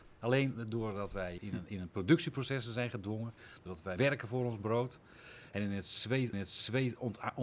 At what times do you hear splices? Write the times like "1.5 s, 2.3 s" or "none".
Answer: 1.4 s, 4.0 s, 6.3 s